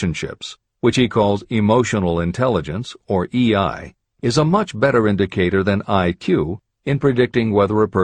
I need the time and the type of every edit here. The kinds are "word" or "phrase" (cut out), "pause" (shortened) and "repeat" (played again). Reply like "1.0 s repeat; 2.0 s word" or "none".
none